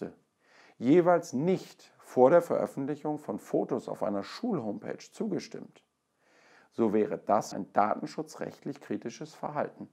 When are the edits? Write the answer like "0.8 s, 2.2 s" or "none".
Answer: 7.5 s